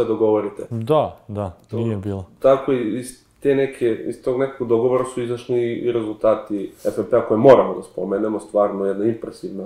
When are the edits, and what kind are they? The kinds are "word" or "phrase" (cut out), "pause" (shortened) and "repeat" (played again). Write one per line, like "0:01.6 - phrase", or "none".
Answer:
0:06.8 - pause